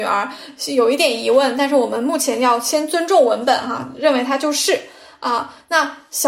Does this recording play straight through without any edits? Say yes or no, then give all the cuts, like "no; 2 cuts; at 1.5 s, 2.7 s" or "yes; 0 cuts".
yes; 0 cuts